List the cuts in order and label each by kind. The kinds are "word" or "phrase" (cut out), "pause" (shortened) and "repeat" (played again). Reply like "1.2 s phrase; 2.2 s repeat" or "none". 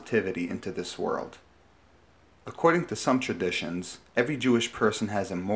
none